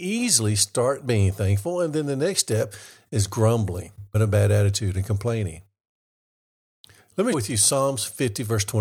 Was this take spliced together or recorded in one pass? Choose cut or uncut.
cut